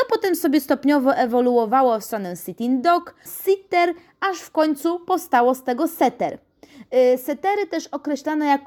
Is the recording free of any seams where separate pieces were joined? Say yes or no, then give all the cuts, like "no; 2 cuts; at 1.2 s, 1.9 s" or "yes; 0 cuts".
no; 1 cut; at 3.3 s